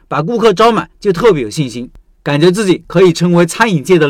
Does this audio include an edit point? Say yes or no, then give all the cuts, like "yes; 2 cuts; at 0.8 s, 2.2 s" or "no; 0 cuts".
no; 0 cuts